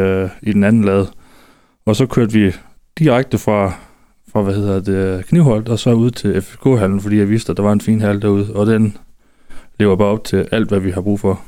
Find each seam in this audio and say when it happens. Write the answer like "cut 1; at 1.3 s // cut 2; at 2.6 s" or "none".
none